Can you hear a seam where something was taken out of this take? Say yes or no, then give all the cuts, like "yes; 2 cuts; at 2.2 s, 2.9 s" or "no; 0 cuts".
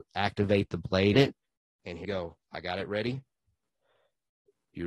yes; 2 cuts; at 1.1 s, 2.0 s